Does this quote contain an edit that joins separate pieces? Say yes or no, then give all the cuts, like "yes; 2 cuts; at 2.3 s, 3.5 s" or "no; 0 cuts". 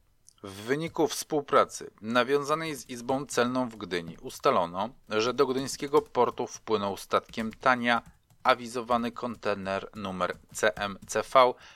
no; 0 cuts